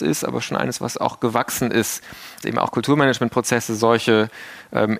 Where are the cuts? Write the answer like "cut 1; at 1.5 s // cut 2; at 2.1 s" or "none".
cut 1; at 2.4 s